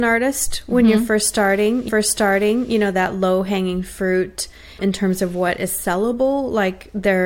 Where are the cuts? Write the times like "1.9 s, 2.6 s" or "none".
1.9 s, 4.8 s